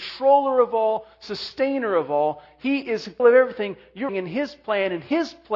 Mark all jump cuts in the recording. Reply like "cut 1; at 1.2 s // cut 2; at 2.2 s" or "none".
cut 1; at 3.2 s // cut 2; at 4.1 s